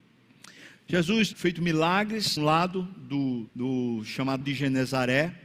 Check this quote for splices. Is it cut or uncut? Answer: cut